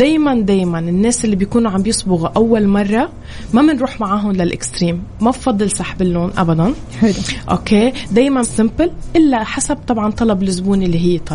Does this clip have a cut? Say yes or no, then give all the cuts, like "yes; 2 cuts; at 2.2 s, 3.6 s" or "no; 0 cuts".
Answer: yes; 1 cut; at 8.4 s